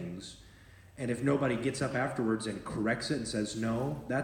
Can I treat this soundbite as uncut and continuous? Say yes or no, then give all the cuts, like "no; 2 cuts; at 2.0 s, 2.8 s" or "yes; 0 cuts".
yes; 0 cuts